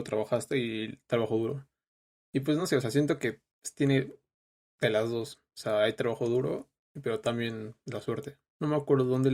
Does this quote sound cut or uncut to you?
uncut